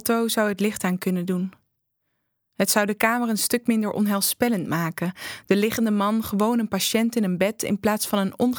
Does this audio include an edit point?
no; 0 cuts

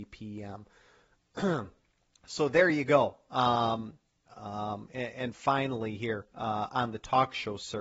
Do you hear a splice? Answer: no; 0 cuts

